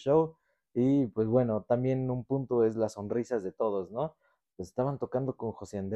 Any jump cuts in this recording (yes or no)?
no